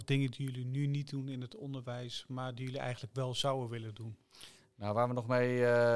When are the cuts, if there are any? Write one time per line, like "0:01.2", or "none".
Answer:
none